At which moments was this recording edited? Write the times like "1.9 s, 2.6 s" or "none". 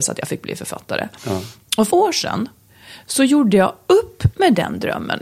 1.9 s